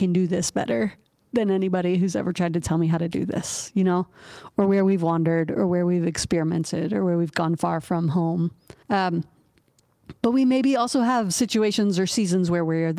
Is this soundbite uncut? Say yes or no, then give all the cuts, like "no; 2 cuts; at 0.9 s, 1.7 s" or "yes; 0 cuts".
no; 1 cut; at 8.8 s